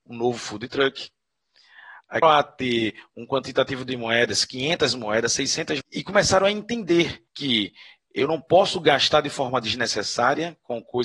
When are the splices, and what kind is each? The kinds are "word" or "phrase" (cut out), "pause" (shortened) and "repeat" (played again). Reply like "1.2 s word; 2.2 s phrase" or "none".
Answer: 2.2 s word; 5.8 s word; 7.3 s pause